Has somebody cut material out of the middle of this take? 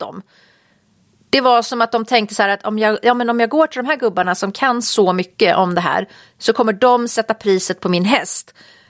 no; 0 cuts

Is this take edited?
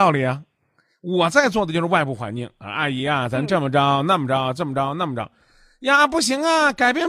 no; 0 cuts

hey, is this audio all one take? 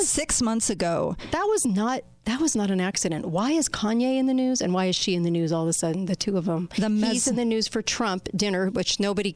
yes; 0 cuts

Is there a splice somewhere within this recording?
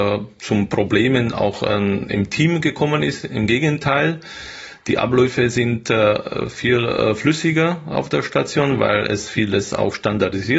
no; 0 cuts

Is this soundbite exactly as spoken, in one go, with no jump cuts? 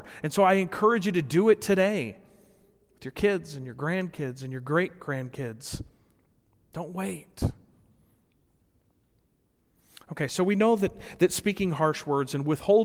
yes; 0 cuts

